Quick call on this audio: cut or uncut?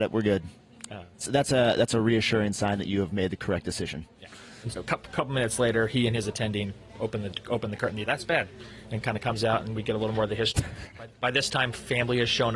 cut